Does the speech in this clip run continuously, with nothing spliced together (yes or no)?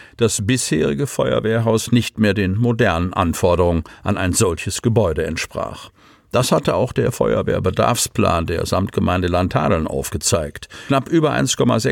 yes